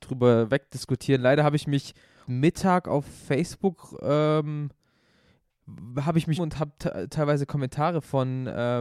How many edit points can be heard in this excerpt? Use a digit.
2